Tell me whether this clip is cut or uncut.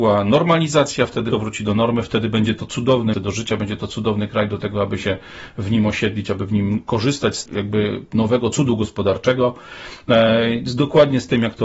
cut